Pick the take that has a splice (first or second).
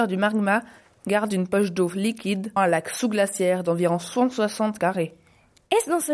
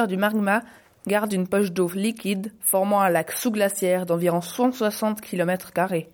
first